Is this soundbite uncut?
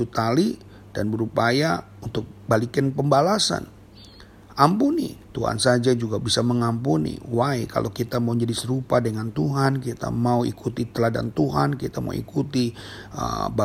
no; 1 cut; at 5.2 s

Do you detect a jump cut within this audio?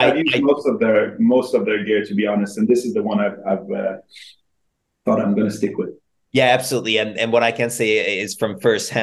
no; 0 cuts

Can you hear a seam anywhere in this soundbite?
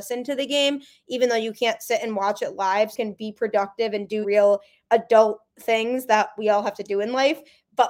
yes; 3 cuts; at 2.9 s, 4.2 s, 5.5 s

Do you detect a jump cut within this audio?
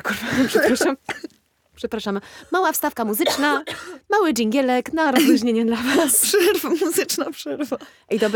no; 0 cuts

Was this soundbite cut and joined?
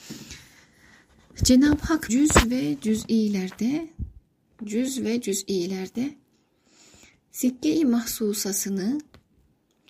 yes; 1 cut; at 2.1 s

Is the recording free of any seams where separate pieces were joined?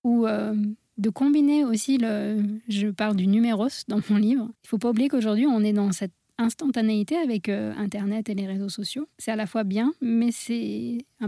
no; 2 cuts; at 4.5 s, 9.1 s

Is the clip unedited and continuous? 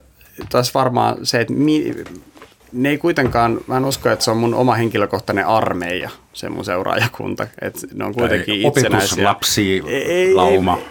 yes; 0 cuts

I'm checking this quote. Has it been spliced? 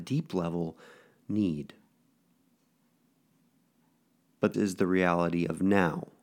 yes; 1 cut; at 4.5 s

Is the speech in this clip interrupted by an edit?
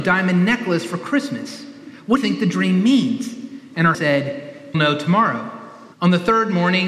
yes; 4 cuts; at 2.2 s, 3.9 s, 4.7 s, 5.9 s

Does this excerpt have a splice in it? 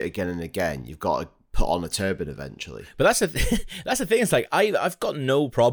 no; 0 cuts

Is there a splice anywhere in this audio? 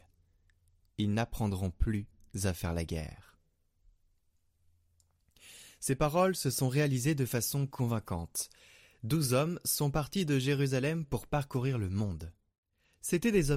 no; 0 cuts

